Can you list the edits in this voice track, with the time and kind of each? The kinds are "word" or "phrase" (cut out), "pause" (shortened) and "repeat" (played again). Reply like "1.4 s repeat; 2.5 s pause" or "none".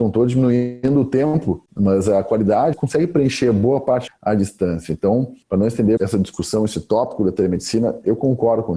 1.7 s pause; 2.7 s phrase; 4.1 s word; 5.4 s pause; 6.0 s word